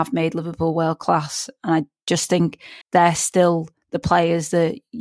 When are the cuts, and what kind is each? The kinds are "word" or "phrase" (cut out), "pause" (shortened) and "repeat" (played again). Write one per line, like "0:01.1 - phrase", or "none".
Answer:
0:02.8 - pause